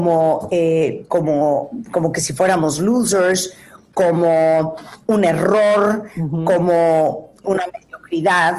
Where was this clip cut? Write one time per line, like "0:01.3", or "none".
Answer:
0:01.9